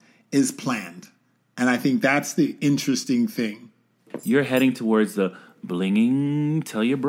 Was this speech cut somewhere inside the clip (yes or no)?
no